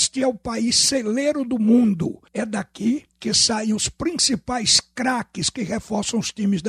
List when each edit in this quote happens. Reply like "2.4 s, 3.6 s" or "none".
2.3 s, 3.1 s